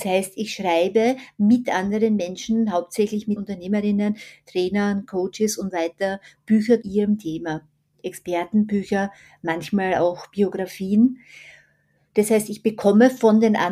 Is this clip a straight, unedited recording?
no; 3 cuts; at 3.4 s, 5.7 s, 6.8 s

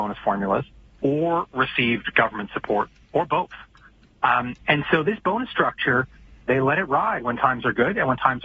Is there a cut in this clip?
no; 0 cuts

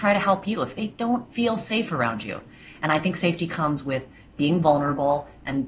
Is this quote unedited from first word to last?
yes; 0 cuts

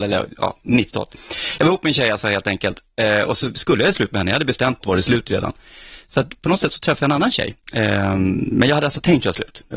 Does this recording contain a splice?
yes; 2 cuts; at 4.8 s, 7.6 s

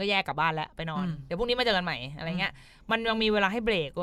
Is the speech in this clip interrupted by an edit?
no; 0 cuts

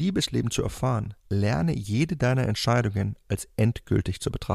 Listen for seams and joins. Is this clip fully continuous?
no; 1 cut; at 1.2 s

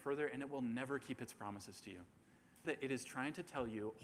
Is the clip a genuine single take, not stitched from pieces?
no; 1 cut; at 2.6 s

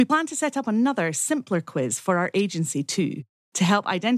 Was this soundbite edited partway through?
no; 0 cuts

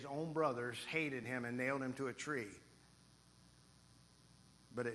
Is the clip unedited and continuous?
yes; 0 cuts

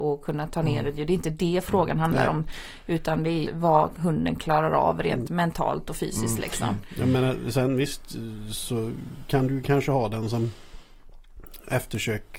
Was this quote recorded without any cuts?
no; 1 cut; at 3.5 s

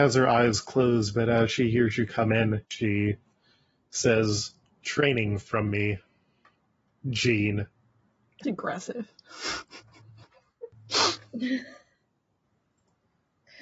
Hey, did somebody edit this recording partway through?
yes; 3 cuts; at 2.7 s, 4.8 s, 8.4 s

